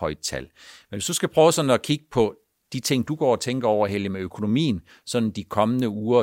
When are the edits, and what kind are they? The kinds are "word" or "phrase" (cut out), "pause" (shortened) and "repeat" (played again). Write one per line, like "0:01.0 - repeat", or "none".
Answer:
none